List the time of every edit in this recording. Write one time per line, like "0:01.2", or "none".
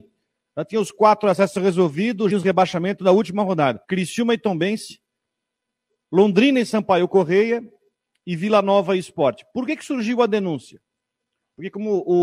0:02.3
0:03.0
0:03.8